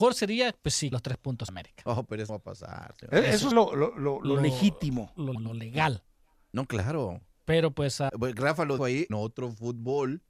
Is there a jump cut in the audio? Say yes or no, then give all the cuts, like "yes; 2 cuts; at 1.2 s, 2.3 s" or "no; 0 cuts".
yes; 8 cuts; at 0.9 s, 1.5 s, 2.3 s, 3.5 s, 5.3 s, 8.1 s, 8.8 s, 9.1 s